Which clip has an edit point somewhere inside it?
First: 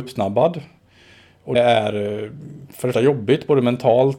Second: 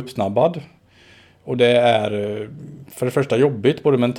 first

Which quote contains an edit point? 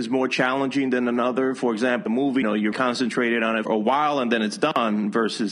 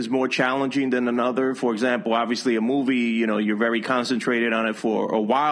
first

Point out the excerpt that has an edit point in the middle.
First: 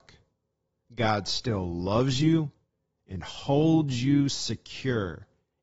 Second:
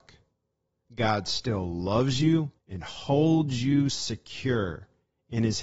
second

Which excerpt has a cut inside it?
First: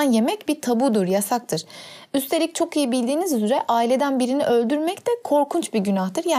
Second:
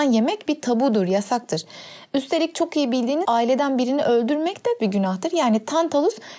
second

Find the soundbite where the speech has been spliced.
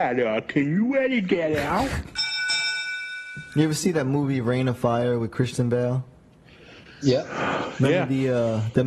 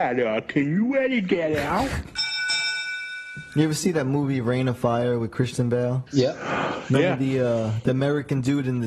second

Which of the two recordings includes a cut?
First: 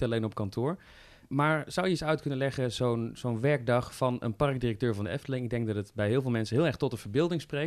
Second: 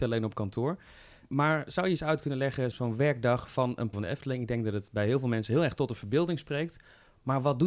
second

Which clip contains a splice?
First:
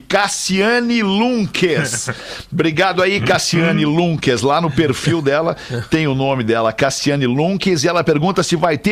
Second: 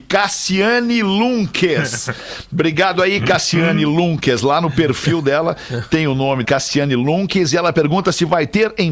second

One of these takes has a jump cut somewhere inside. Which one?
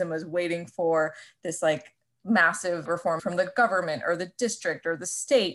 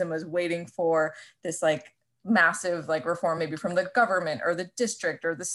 first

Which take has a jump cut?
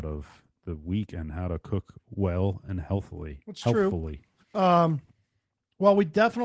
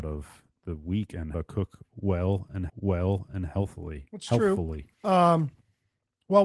second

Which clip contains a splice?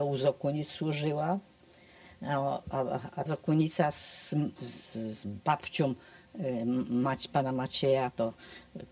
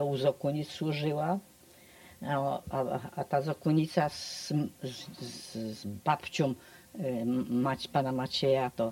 first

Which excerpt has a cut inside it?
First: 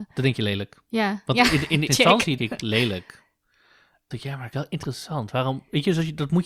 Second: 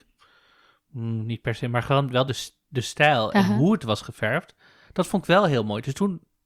first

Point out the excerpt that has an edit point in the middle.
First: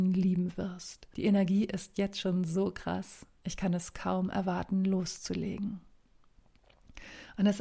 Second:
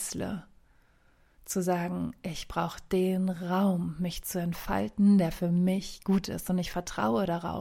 first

